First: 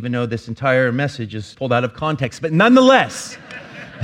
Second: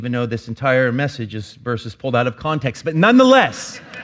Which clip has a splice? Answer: first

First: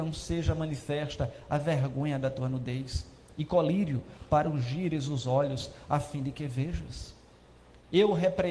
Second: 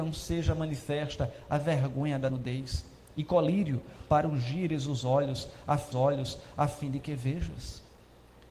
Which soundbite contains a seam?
second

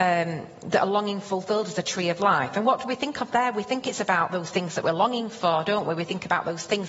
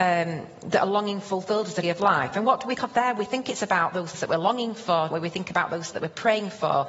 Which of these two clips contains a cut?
second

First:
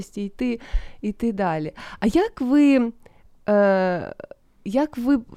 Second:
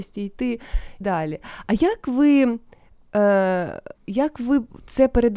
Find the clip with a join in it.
second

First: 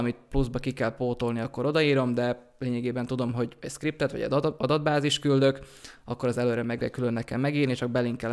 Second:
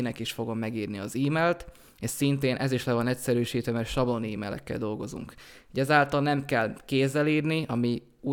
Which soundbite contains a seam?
first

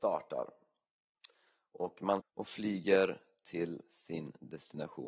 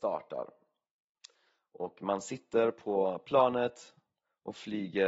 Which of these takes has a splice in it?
first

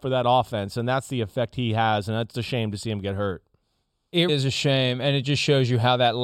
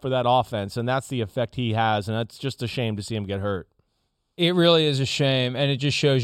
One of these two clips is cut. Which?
first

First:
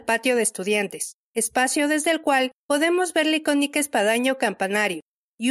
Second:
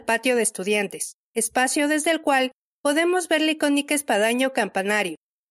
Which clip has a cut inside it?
first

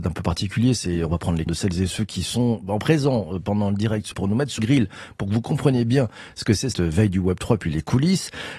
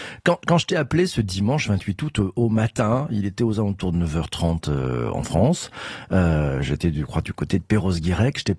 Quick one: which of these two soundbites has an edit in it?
first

